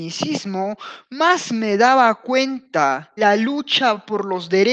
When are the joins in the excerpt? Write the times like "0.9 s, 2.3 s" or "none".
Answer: 3.2 s